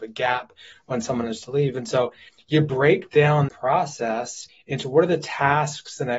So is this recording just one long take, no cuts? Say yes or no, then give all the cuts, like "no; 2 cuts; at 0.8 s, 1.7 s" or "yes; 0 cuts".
no; 1 cut; at 3.5 s